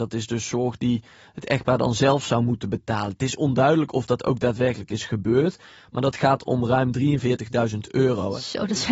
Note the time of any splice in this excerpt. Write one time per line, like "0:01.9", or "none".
none